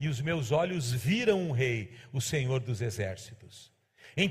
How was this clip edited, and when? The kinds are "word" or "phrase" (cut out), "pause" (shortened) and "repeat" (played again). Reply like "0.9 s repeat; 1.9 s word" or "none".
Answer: none